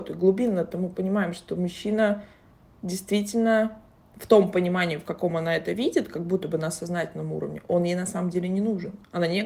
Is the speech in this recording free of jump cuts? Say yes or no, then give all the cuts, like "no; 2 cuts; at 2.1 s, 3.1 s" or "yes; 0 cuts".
yes; 0 cuts